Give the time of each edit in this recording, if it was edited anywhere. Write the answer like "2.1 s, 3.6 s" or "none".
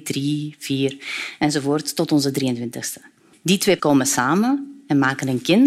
3.8 s